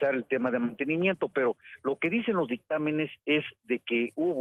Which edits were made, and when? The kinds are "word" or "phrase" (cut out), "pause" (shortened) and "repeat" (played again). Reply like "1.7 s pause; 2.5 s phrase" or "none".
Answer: none